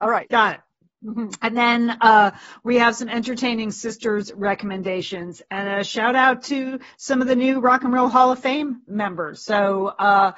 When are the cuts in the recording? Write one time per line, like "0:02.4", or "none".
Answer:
none